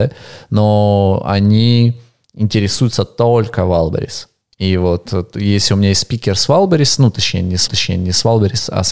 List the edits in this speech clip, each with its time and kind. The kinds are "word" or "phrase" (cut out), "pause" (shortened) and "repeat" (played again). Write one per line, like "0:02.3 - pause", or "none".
0:07.7 - repeat